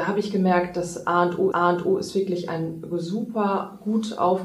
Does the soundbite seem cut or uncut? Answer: cut